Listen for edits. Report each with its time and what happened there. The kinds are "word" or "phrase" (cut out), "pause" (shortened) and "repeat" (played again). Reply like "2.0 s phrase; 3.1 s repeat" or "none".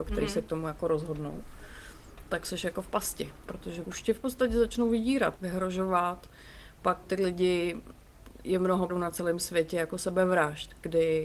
3.8 s word; 5.4 s word; 7.0 s word; 8.9 s word